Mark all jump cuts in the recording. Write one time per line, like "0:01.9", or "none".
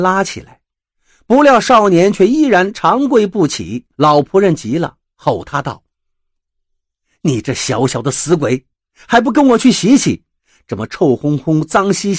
0:03.9